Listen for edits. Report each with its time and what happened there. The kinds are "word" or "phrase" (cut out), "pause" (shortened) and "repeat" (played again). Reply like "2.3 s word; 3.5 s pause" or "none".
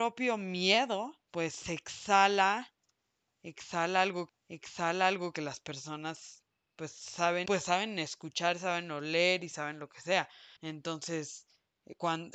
1.2 s pause; 4.3 s repeat; 6.5 s pause; 7.5 s word; 10.6 s pause